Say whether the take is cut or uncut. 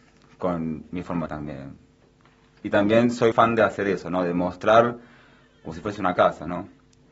cut